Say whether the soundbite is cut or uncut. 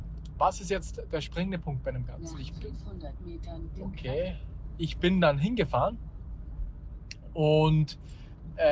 uncut